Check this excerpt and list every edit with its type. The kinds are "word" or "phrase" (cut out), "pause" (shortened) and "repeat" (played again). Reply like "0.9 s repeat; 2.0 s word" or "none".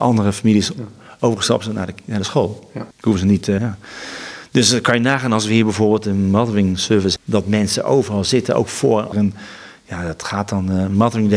2.9 s pause; 3.6 s word; 7.2 s word; 9.1 s word